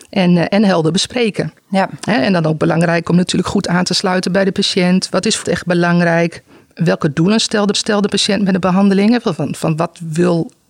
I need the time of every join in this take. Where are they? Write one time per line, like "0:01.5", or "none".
0:05.4
0:07.7